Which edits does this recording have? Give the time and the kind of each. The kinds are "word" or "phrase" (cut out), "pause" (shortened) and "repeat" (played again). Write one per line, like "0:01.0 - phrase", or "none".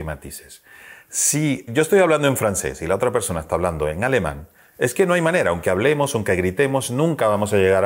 0:01.7 - word